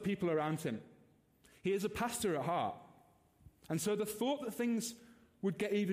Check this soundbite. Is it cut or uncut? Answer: uncut